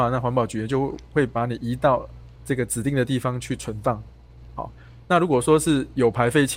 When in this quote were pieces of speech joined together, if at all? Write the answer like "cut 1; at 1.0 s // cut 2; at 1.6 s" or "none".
cut 1; at 2.4 s